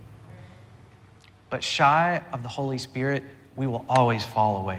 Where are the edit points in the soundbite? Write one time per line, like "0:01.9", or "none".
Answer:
none